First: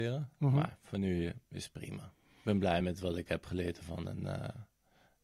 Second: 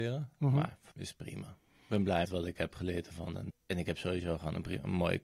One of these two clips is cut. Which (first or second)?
second